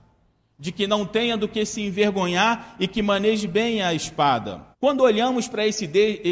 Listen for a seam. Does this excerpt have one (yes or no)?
yes